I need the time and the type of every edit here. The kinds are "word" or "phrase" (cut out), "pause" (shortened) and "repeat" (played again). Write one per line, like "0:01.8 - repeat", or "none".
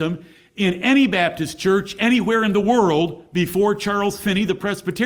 none